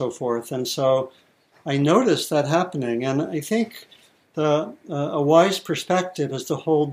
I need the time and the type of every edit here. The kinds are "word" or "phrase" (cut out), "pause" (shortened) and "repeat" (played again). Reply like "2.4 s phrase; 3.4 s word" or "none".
none